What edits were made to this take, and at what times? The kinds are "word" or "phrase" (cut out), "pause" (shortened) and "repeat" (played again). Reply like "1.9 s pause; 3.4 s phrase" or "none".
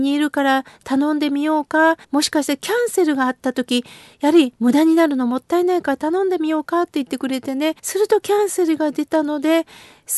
2.0 s pause; 7.8 s pause